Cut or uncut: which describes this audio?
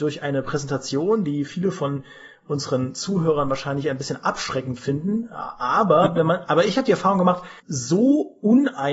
cut